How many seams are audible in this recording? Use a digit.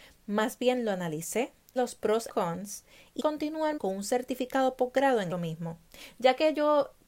5